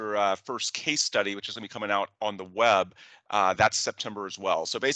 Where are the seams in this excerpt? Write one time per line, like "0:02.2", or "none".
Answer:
none